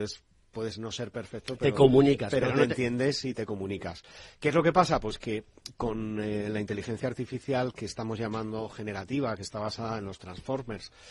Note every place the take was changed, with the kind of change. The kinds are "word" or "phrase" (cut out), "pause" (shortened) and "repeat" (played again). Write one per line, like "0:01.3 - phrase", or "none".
none